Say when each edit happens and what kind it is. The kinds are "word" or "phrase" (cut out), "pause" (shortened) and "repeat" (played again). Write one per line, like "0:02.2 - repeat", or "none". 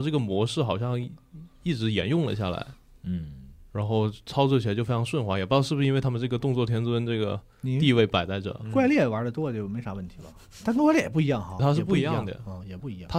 0:11.6 - word